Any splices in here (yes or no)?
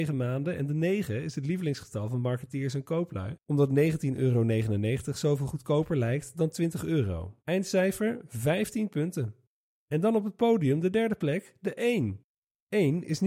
yes